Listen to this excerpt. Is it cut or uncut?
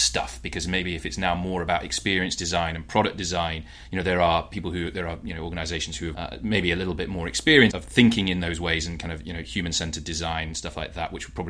cut